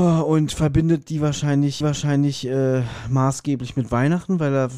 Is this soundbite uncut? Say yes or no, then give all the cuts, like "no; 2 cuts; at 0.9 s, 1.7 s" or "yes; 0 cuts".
no; 1 cut; at 1.8 s